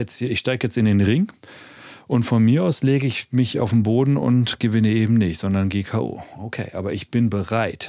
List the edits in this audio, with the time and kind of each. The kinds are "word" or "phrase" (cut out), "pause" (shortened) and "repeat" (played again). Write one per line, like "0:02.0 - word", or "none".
none